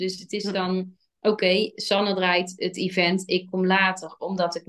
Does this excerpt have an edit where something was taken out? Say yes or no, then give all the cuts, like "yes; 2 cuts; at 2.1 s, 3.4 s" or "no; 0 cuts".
no; 0 cuts